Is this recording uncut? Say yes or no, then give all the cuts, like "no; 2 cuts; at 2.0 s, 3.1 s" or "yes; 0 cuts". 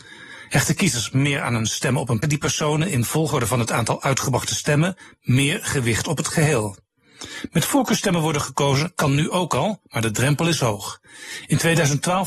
no; 1 cut; at 2.2 s